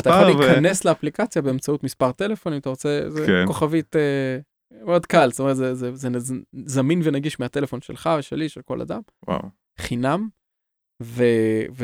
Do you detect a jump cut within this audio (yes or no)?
no